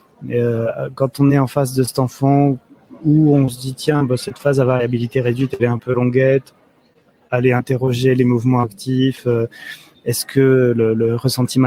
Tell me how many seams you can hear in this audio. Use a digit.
0